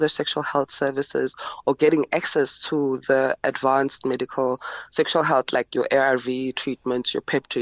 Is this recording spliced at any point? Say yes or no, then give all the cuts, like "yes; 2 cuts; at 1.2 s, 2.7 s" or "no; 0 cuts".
no; 0 cuts